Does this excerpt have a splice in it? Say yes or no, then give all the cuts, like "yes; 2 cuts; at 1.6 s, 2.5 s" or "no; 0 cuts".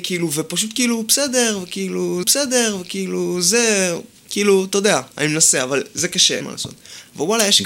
yes; 3 cuts; at 2.2 s, 5.1 s, 6.4 s